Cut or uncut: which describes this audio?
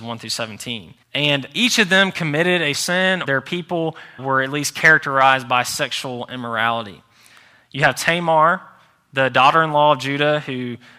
cut